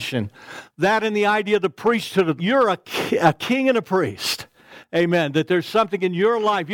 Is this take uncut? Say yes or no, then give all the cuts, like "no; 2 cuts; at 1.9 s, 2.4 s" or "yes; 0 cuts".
no; 1 cut; at 2.4 s